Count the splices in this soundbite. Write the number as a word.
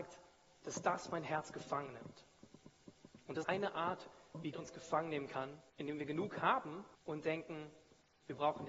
four